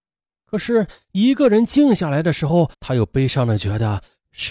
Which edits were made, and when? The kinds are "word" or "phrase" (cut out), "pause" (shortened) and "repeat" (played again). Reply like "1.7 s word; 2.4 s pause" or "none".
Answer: 2.7 s pause